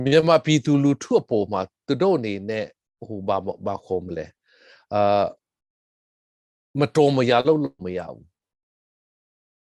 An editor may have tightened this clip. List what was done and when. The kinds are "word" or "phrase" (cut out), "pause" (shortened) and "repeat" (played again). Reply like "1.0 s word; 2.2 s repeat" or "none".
none